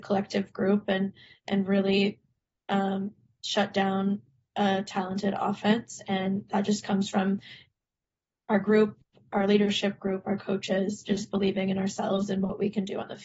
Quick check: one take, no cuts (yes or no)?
yes